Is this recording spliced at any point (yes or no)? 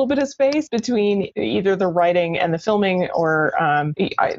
no